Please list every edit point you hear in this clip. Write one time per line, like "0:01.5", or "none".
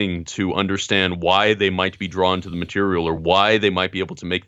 none